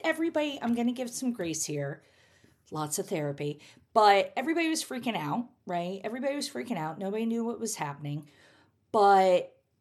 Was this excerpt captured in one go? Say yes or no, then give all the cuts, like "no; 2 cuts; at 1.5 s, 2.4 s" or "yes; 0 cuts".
yes; 0 cuts